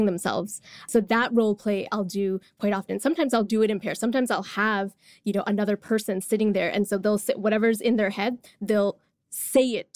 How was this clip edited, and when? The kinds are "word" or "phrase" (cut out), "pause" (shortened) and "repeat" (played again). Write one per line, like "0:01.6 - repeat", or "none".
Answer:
none